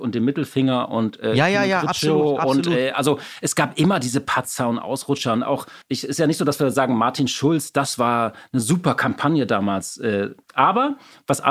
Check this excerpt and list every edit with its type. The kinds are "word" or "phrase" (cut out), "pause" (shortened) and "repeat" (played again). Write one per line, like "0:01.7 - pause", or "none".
0:05.8 - pause